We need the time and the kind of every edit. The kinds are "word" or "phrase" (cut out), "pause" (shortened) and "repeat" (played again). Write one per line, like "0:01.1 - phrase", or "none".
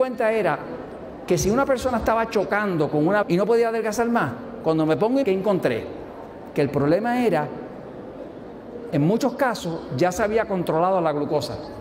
0:03.2 - word
0:05.2 - word